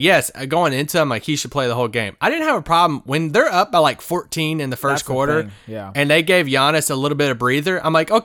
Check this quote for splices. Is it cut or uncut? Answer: uncut